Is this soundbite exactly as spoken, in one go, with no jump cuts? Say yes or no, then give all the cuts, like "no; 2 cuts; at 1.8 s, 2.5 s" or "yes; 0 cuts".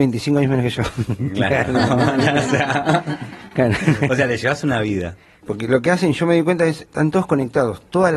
yes; 0 cuts